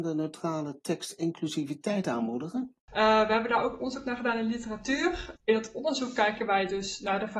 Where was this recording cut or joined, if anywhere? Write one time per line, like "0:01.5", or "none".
0:02.8
0:05.4